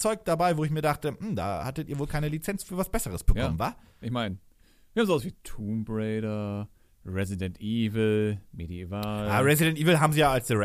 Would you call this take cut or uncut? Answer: uncut